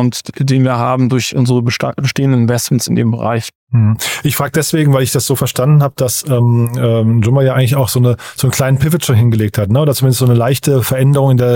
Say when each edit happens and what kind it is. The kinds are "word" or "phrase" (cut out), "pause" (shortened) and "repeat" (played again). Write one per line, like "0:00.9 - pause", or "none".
none